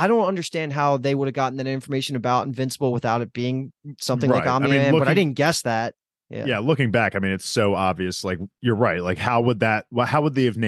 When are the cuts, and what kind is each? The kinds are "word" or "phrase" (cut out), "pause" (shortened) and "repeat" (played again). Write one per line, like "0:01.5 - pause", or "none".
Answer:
none